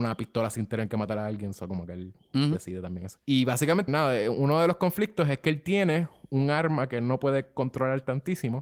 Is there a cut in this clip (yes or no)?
yes